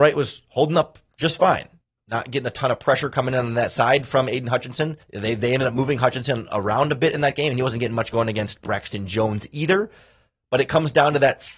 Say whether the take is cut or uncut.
cut